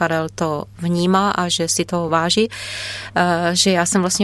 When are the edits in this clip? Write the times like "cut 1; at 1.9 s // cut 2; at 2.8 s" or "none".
none